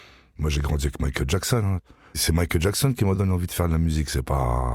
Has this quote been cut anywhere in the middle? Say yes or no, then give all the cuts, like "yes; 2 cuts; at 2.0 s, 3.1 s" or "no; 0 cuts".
no; 0 cuts